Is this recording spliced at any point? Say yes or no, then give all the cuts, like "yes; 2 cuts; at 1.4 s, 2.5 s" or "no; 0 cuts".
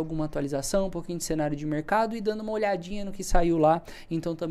no; 0 cuts